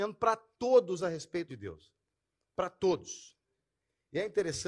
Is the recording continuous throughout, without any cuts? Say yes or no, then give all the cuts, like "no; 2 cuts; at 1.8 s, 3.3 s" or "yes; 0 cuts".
no; 1 cut; at 1.5 s